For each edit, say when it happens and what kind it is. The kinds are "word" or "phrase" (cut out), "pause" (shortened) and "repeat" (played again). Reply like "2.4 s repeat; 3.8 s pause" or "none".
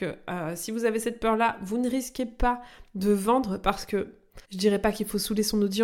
4.4 s pause